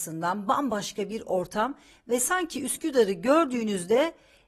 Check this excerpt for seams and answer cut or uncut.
uncut